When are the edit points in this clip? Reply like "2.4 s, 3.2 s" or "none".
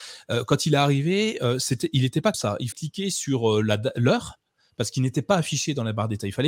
2.3 s, 2.7 s